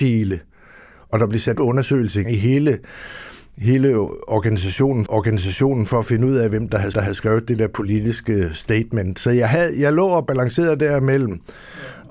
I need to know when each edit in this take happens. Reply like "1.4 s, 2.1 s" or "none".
1.5 s, 2.2 s, 5.1 s, 6.9 s